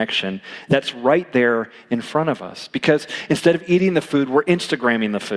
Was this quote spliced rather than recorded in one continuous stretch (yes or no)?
no